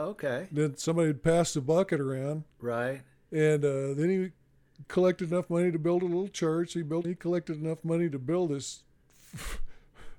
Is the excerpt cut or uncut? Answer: cut